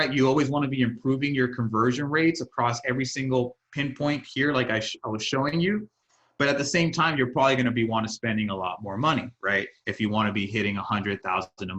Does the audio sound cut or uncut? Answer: uncut